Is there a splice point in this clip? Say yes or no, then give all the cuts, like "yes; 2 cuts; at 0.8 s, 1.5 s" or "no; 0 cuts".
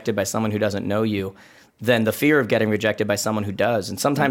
no; 0 cuts